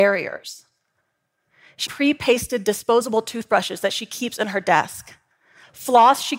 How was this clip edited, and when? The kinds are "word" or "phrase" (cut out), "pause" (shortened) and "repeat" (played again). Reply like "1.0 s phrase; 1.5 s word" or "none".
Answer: 1.9 s phrase